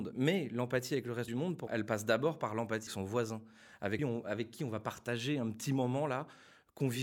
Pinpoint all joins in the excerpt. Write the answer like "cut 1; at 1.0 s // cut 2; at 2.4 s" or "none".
cut 1; at 1.3 s // cut 2; at 1.7 s // cut 3; at 2.9 s // cut 4; at 4.0 s